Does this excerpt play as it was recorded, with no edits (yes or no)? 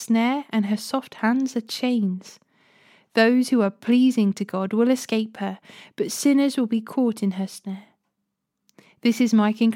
yes